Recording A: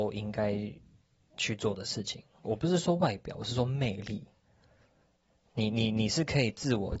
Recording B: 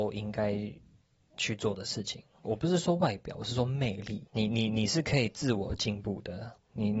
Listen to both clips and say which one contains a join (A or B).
B